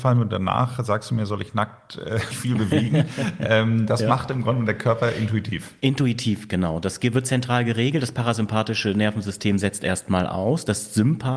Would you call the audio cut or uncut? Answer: cut